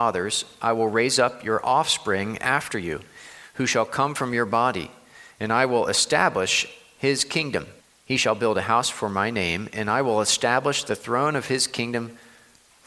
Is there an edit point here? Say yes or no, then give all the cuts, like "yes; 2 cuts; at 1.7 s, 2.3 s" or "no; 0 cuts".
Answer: yes; 1 cut; at 7.8 s